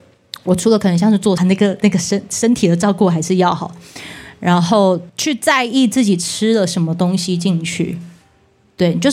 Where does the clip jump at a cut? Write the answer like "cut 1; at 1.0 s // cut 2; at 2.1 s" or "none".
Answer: cut 1; at 1.4 s // cut 2; at 5.1 s